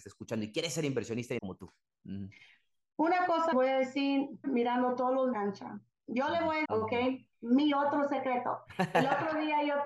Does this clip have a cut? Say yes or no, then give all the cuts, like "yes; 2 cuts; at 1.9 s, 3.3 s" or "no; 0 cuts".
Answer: yes; 5 cuts; at 1.4 s, 3.5 s, 4.4 s, 5.3 s, 6.6 s